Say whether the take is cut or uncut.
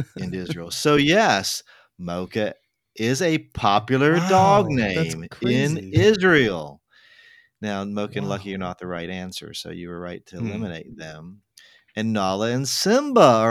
uncut